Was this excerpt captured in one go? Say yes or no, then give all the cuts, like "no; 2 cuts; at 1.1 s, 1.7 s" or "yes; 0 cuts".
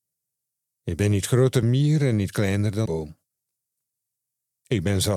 no; 2 cuts; at 1.6 s, 2.9 s